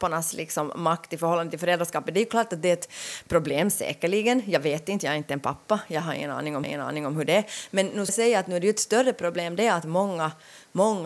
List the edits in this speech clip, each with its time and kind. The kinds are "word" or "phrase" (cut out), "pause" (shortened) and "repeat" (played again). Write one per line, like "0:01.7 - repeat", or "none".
0:06.6 - repeat
0:08.1 - word